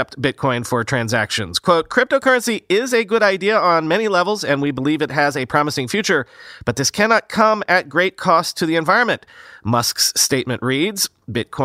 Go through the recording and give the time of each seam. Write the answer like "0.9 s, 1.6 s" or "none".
none

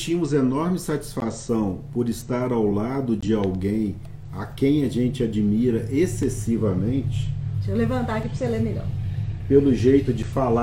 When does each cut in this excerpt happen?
none

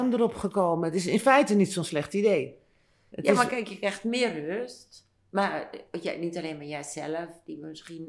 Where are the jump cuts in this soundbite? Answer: none

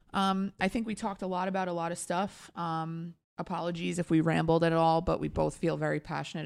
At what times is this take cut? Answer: none

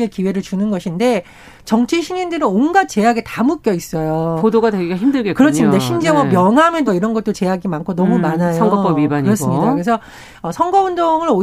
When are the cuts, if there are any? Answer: 6.9 s

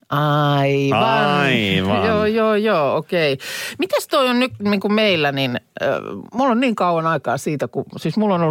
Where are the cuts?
none

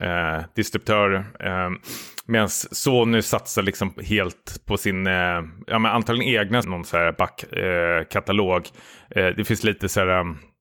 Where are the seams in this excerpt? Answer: 5.6 s, 6.6 s

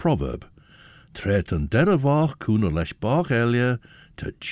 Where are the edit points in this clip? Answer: none

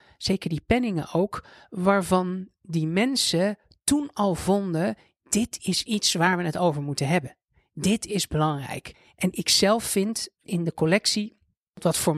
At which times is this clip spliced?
10.4 s

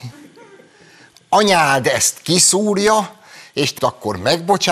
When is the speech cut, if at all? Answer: 3.8 s

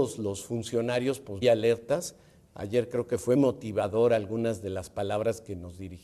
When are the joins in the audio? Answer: 1.4 s, 3.4 s

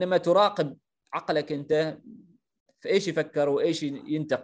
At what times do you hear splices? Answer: none

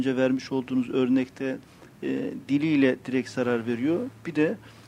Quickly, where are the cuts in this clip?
none

